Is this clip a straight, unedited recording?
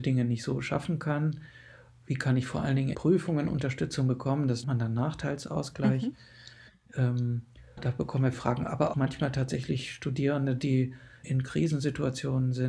no; 6 cuts; at 2.9 s, 4.6 s, 7.8 s, 8.3 s, 8.9 s, 11.2 s

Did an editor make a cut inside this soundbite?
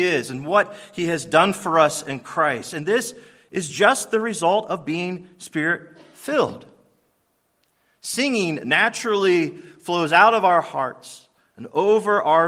no; 0 cuts

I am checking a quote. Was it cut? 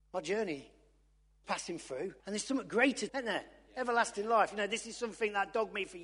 yes; 3 cuts; at 1.4 s, 2.2 s, 3.1 s

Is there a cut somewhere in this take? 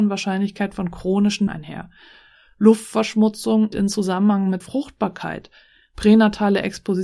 yes; 3 cuts; at 1.5 s, 3.7 s, 4.6 s

